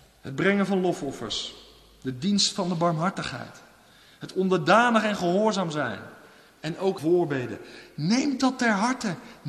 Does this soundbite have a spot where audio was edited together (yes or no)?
yes